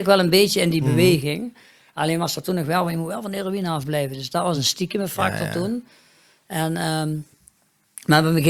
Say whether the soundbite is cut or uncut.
uncut